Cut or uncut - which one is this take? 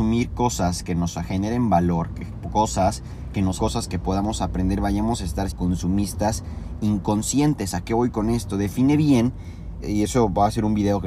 cut